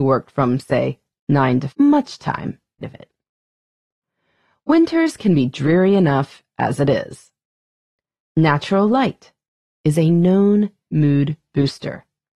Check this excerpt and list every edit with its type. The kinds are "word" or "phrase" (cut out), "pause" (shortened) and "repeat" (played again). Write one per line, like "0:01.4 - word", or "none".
0:01.7 - phrase
0:02.8 - word